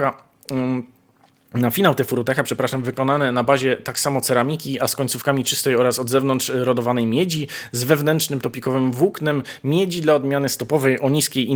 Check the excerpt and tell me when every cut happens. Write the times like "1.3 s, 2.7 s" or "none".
none